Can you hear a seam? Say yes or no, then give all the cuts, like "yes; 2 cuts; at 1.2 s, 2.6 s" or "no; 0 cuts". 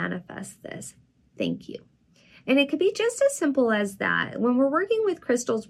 no; 0 cuts